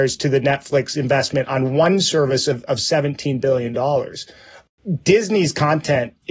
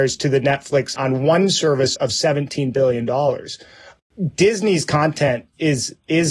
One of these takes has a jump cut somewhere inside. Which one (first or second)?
second